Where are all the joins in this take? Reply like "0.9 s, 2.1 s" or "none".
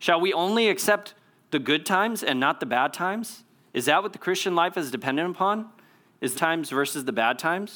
6.3 s